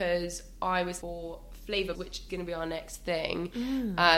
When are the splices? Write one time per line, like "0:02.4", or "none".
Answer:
0:01.0
0:01.9
0:02.3